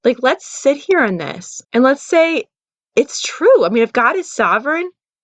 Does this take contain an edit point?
yes; 1 cut; at 1.6 s

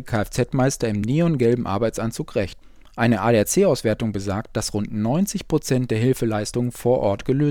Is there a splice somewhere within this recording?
no; 0 cuts

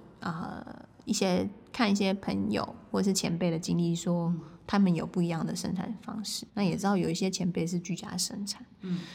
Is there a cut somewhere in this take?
yes; 1 cut; at 6.5 s

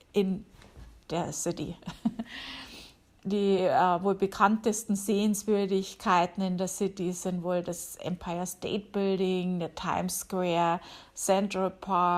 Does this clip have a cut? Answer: no; 0 cuts

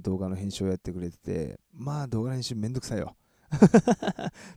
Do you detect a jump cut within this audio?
yes; 1 cut; at 1.6 s

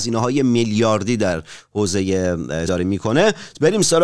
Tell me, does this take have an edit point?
yes; 1 cut; at 2.7 s

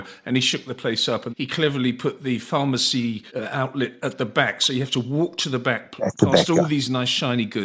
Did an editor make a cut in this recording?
yes; 2 cuts; at 1.3 s, 3.3 s

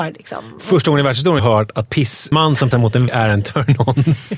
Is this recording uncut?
no; 5 cuts; at 1.4 s, 1.8 s, 2.3 s, 2.7 s, 3.1 s

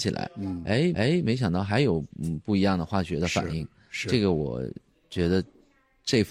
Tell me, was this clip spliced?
yes; 2 cuts; at 0.9 s, 2.1 s

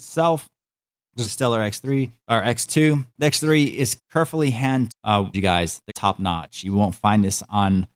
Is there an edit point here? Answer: yes; 7 cuts; at 1.2 s, 2.2 s, 3.1 s, 4.0 s, 4.9 s, 5.3 s, 5.9 s

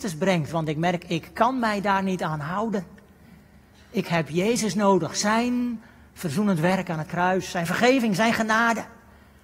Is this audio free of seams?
yes; 0 cuts

